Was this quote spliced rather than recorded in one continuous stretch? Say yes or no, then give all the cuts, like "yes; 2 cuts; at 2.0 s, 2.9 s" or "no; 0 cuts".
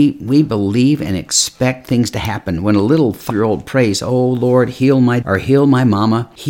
yes; 2 cuts; at 3.3 s, 5.2 s